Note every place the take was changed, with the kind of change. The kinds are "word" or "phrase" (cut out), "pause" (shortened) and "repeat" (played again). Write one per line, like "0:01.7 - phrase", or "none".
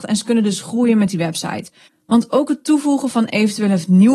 0:01.9 - pause